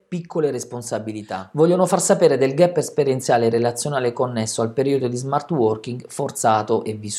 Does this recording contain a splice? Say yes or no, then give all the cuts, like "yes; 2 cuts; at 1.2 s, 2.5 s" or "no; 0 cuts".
no; 0 cuts